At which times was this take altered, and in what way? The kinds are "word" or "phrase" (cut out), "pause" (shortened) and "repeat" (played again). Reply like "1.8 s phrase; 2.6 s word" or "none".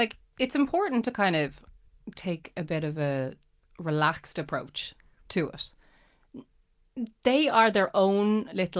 none